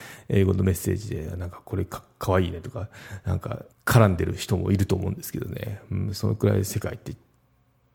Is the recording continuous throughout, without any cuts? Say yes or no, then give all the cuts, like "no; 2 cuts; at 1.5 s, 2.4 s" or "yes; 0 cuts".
no; 1 cut; at 3.7 s